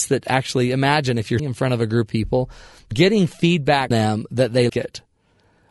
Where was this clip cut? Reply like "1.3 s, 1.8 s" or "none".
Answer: 1.4 s, 2.1 s, 2.9 s, 3.9 s, 4.7 s